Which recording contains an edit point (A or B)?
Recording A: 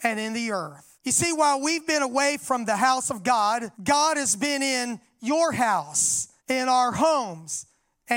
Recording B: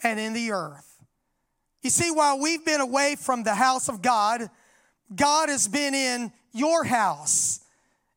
A